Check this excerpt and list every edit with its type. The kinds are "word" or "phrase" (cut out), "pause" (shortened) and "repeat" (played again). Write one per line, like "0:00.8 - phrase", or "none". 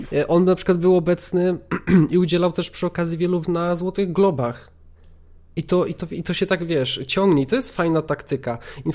0:03.4 - word

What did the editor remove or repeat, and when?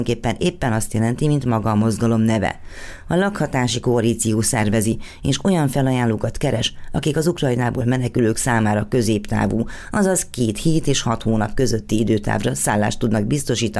none

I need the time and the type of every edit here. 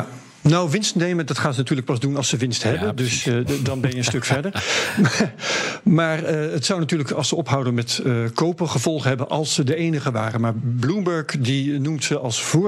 none

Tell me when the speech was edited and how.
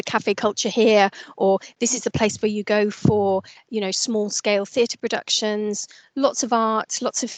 none

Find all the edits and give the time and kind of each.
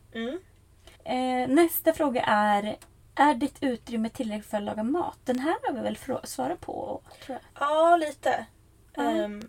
0:00.9 - pause
0:03.0 - pause
0:07.5 - pause

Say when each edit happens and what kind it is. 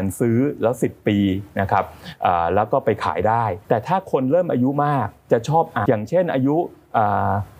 0:03.6 - pause
0:05.9 - word

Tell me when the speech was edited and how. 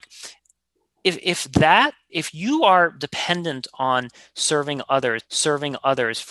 0:02.1 - word
0:05.2 - repeat

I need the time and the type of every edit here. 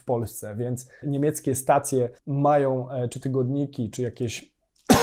0:01.0 - word
0:02.2 - pause
0:03.2 - word
0:03.9 - word

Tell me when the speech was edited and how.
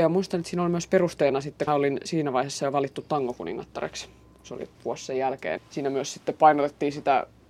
0:01.7 - word
0:04.7 - pause
0:05.6 - word

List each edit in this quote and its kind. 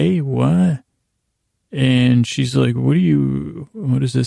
0:01.0 - pause

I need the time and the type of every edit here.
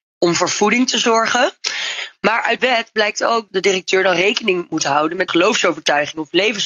0:02.6 - word
0:03.5 - word
0:05.3 - word

